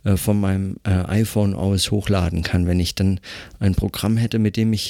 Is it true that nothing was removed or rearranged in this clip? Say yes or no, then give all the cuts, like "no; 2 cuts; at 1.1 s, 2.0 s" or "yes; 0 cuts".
yes; 0 cuts